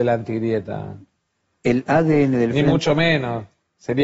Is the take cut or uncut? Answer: uncut